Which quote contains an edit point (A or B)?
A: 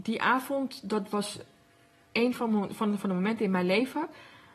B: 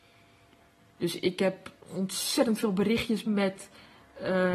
B